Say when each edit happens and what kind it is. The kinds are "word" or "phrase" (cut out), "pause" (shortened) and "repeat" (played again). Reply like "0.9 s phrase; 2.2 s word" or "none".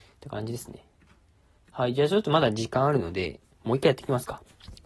none

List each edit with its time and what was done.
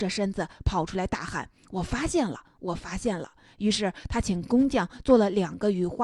none

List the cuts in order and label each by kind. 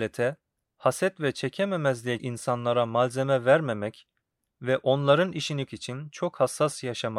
2.2 s word; 5.7 s word

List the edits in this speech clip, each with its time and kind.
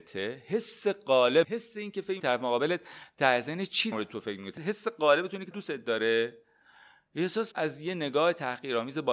1.4 s word; 2.2 s word; 3.9 s word; 4.6 s word; 5.5 s word; 7.5 s word

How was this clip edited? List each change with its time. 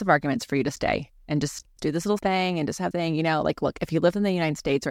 1.8 s word; 2.2 s word; 2.9 s word

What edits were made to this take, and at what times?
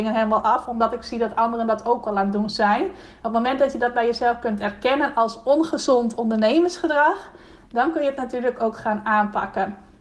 none

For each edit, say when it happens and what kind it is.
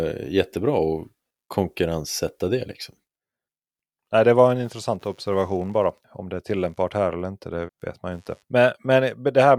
7.7 s word

